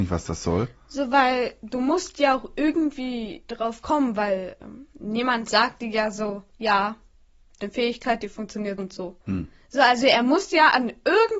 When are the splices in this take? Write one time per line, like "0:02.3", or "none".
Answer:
0:06.5
0:07.6
0:08.8
0:09.2